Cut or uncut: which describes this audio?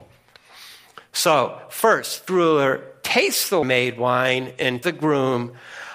cut